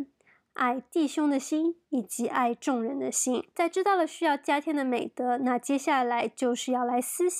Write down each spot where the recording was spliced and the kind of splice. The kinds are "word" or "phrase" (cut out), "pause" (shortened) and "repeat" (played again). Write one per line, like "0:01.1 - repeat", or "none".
0:01.8 - pause
0:03.5 - pause